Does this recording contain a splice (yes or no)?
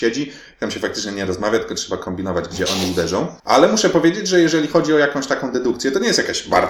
yes